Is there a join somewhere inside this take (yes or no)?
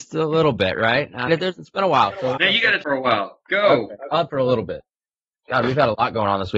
yes